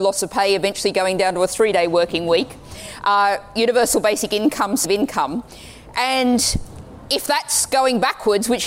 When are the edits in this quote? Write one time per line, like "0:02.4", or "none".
0:04.8